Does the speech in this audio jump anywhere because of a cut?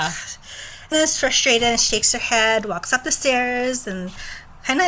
yes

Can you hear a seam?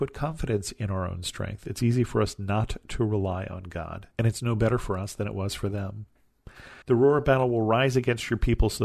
yes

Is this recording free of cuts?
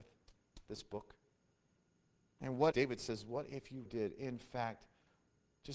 no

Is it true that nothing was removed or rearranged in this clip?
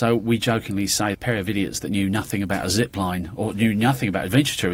no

